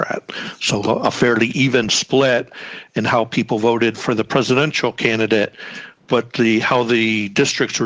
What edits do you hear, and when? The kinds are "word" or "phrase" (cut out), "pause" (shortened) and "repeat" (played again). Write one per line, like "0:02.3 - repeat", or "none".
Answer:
0:06.0 - pause